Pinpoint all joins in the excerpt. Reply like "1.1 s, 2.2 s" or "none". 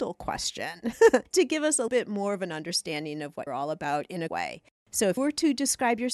1.3 s, 1.9 s, 3.5 s, 4.3 s, 5.2 s